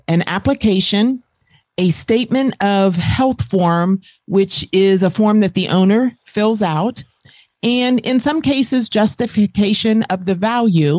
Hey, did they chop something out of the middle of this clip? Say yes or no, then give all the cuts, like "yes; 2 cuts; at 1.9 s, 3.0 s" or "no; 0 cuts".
no; 0 cuts